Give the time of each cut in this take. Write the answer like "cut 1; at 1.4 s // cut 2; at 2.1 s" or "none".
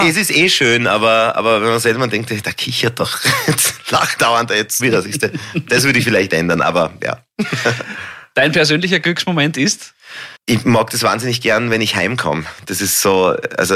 cut 1; at 4.2 s // cut 2; at 4.8 s // cut 3; at 10.4 s